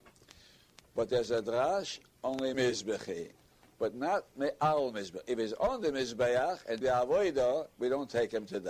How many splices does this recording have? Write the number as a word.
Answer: two